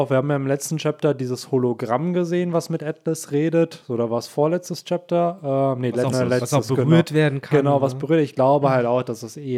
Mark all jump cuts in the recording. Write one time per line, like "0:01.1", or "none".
0:06.1